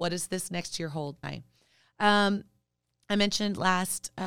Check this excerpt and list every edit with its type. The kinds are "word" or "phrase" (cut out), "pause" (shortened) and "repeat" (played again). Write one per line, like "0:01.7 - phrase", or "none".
0:01.2 - phrase